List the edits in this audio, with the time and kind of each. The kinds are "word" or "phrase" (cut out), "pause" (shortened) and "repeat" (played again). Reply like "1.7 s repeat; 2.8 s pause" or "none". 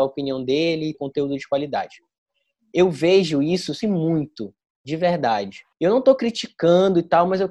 0.9 s phrase; 3.8 s word; 5.7 s pause